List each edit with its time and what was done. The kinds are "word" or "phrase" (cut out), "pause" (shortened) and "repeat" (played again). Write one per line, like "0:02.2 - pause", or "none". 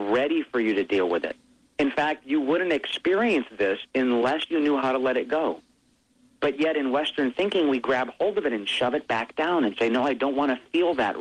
none